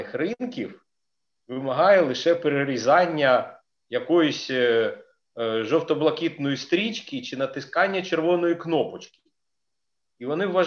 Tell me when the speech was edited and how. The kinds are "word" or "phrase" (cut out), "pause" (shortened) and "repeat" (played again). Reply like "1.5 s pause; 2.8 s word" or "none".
none